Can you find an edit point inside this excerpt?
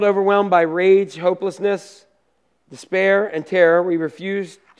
no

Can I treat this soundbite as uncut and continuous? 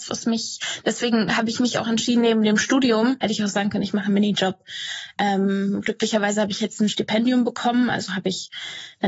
yes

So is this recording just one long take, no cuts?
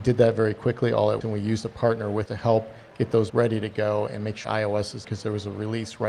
no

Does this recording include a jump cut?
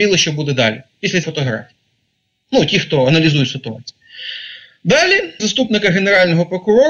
yes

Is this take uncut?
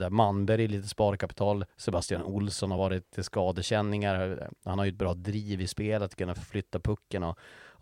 yes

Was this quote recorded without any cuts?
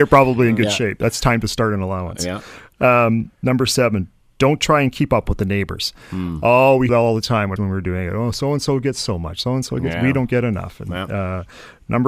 no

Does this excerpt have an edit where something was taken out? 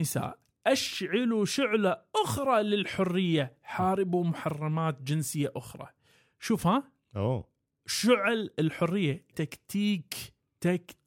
yes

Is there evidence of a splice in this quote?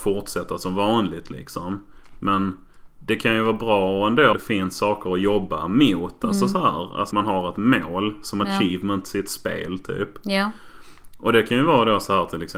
yes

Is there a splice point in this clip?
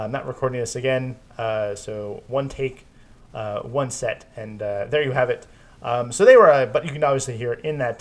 no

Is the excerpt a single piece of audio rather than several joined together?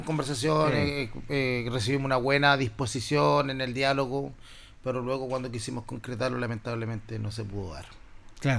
yes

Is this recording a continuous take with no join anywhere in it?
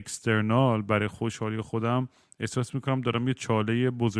yes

